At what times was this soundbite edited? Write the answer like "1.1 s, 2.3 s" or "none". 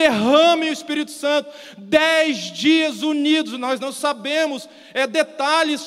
none